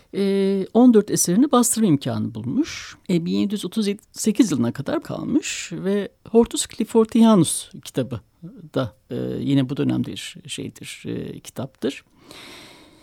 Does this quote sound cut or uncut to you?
cut